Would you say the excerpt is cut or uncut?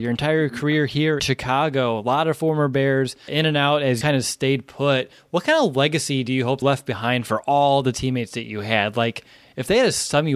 cut